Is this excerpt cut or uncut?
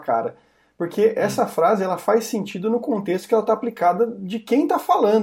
uncut